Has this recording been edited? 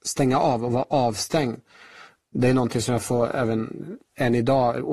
no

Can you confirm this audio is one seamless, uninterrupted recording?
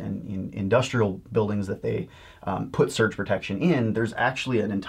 yes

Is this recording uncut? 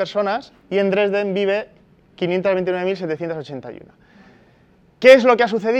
yes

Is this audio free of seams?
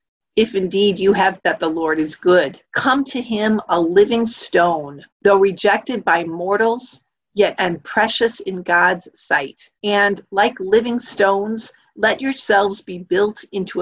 no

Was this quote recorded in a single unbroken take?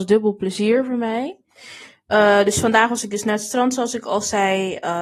yes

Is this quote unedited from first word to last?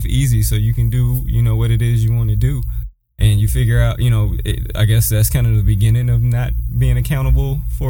yes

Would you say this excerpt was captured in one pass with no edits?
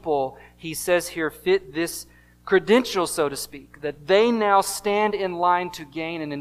yes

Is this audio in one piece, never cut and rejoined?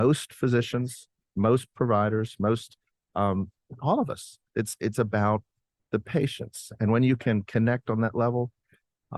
yes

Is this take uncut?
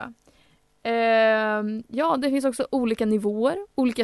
yes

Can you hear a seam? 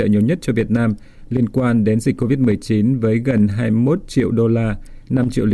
no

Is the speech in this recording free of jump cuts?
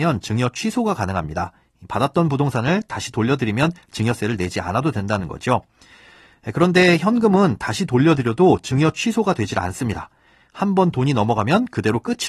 yes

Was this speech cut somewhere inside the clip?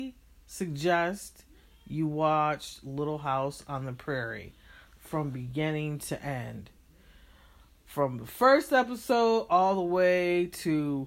no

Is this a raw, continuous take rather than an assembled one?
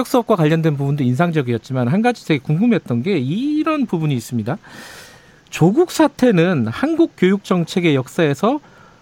yes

